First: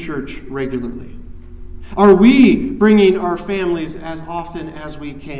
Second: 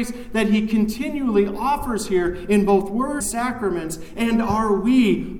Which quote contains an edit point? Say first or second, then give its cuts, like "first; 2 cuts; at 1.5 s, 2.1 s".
second; 1 cut; at 3.2 s